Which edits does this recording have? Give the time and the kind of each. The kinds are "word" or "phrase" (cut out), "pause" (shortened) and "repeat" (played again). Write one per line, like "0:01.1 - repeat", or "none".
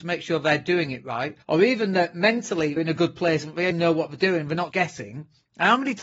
0:01.4 - pause
0:02.8 - word
0:03.7 - word
0:04.7 - word